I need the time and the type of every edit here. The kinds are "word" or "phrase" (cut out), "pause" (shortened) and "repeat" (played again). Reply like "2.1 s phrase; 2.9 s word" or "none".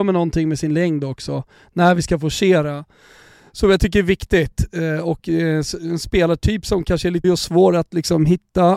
7.2 s word